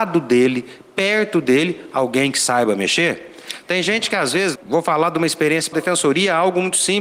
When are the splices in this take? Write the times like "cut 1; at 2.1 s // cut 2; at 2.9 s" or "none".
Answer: cut 1; at 4.5 s // cut 2; at 5.7 s